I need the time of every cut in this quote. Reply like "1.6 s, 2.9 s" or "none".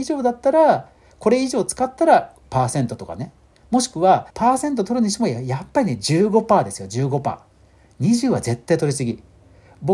4.3 s

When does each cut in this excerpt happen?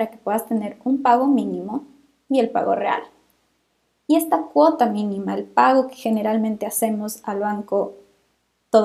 none

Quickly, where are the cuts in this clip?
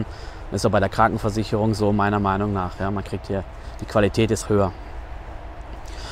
4.4 s

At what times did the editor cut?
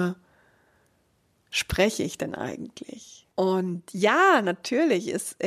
3.3 s

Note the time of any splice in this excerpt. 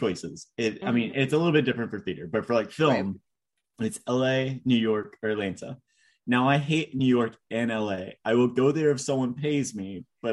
none

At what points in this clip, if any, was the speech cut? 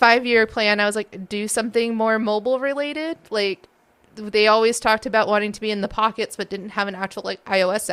none

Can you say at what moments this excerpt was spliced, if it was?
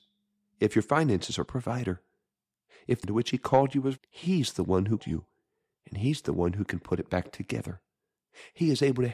1.5 s, 3.0 s, 4.0 s, 5.0 s

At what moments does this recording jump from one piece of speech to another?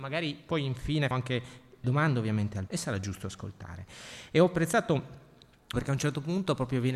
1.1 s, 1.8 s, 2.7 s, 5.7 s

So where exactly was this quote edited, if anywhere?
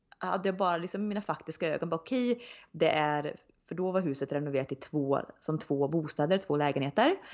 none

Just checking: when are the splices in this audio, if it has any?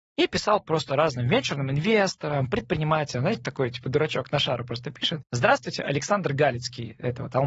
5.2 s

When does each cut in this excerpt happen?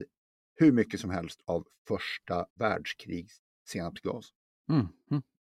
2.5 s

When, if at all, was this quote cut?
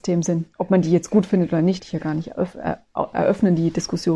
1.8 s

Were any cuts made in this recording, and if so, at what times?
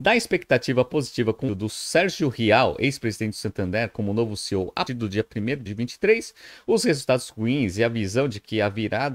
1.5 s, 4.9 s, 5.7 s

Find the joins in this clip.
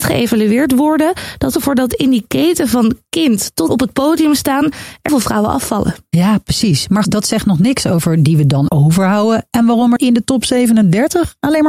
1.5 s, 3.7 s, 5.1 s, 7.0 s, 8.7 s, 10.0 s

